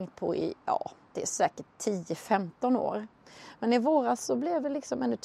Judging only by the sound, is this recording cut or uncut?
uncut